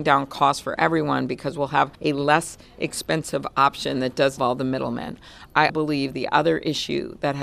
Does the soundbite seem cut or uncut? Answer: cut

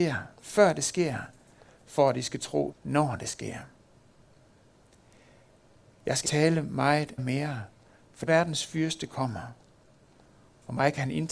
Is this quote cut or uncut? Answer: cut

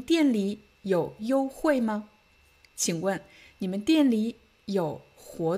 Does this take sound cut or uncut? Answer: uncut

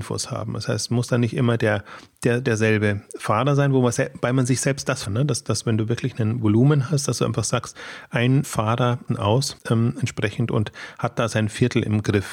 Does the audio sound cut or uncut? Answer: cut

